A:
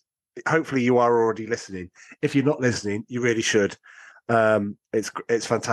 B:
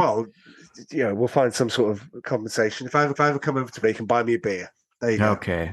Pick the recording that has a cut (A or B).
B